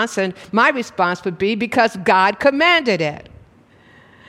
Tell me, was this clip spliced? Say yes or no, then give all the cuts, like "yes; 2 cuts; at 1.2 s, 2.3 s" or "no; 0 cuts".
no; 0 cuts